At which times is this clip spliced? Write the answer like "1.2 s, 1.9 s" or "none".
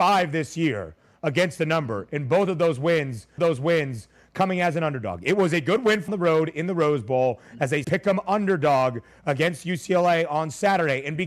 3.4 s, 6.1 s, 7.8 s